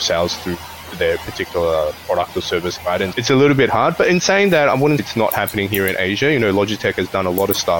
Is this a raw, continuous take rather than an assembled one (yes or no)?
no